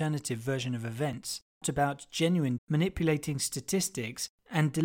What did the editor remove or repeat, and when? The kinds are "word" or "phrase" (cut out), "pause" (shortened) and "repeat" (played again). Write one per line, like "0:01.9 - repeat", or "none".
0:01.6 - phrase
0:02.6 - word